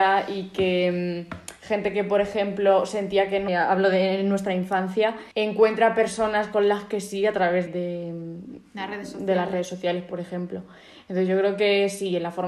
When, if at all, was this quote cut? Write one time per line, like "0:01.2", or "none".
0:03.5
0:05.3
0:07.7